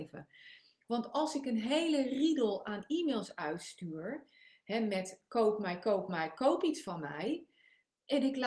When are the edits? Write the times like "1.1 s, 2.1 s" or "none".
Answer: none